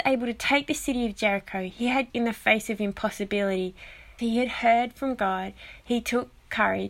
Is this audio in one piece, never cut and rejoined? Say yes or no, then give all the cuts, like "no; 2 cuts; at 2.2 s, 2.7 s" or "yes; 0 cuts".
no; 2 cuts; at 2.1 s, 4.2 s